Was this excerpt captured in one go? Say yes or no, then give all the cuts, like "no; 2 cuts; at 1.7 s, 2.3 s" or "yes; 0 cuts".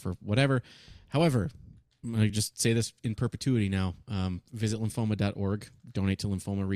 yes; 0 cuts